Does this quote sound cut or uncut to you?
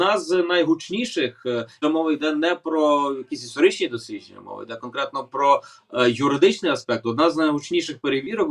cut